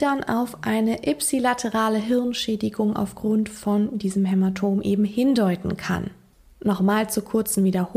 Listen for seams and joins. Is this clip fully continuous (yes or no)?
yes